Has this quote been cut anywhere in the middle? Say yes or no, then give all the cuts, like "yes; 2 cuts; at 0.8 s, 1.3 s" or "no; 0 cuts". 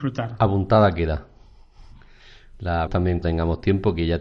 yes; 2 cuts; at 2.9 s, 3.2 s